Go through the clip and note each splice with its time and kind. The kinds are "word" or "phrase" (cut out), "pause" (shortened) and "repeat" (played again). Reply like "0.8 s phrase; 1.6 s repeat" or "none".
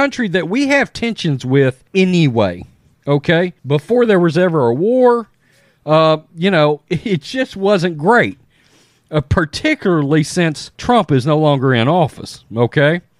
1.9 s pause; 3.6 s pause; 10.7 s pause